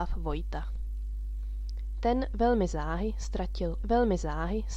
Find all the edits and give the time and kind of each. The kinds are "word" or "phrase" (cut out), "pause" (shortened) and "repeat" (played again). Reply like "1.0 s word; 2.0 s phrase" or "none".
3.8 s repeat